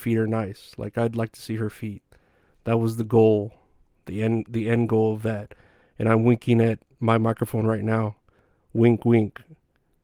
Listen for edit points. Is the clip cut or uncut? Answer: uncut